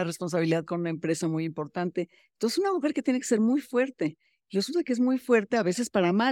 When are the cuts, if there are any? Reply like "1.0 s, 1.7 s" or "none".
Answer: none